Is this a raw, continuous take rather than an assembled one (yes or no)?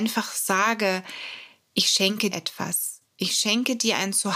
no